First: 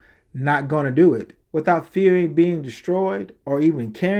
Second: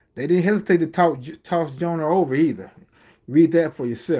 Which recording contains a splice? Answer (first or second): first